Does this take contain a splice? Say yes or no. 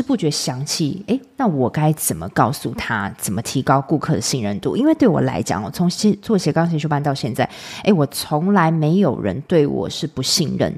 no